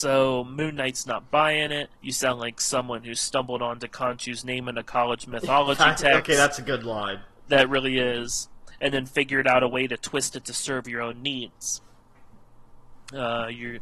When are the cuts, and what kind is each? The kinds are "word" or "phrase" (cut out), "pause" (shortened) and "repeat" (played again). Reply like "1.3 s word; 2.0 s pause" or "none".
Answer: 1.9 s pause